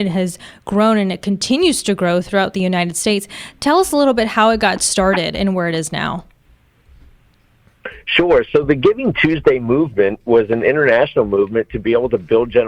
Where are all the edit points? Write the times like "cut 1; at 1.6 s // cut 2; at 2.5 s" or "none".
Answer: none